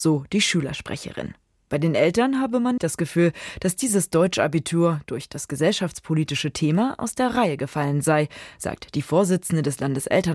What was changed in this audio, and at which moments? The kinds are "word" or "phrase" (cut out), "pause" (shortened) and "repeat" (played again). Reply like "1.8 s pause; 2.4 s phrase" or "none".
2.8 s word